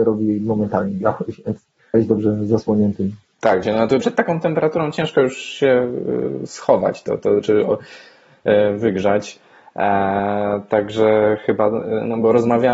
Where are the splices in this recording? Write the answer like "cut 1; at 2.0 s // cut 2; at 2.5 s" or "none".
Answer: cut 1; at 1.9 s // cut 2; at 3.6 s // cut 3; at 4.0 s // cut 4; at 7.2 s